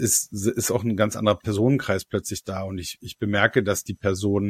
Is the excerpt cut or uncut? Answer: uncut